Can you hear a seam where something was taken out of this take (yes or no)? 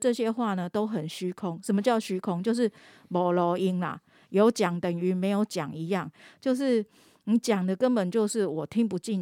no